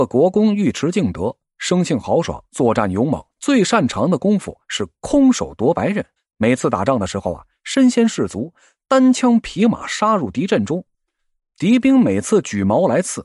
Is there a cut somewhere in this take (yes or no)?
yes